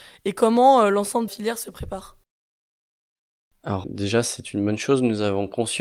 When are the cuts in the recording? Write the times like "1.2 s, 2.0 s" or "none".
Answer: 1.3 s, 3.8 s